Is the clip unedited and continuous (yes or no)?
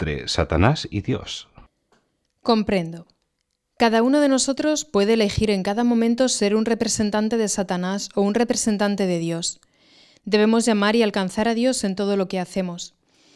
yes